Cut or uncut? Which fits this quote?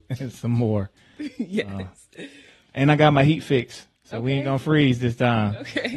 uncut